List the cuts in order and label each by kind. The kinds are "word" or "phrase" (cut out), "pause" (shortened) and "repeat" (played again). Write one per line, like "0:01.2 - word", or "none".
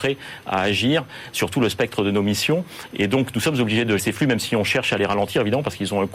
0:04.0 - word